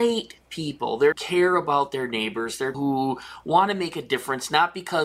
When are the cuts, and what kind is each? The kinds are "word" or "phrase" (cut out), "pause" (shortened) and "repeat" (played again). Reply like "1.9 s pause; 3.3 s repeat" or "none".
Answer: 1.1 s phrase; 2.7 s word